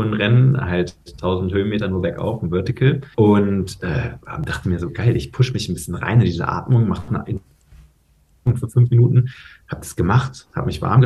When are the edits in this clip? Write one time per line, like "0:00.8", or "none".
0:01.0
0:03.1